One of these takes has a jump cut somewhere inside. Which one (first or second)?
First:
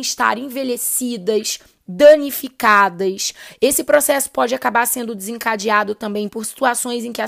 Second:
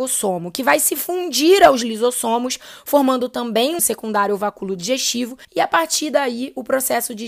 second